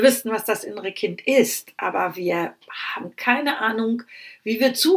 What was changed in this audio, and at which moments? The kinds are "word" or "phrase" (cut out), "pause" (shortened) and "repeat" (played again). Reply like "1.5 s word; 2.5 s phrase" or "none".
none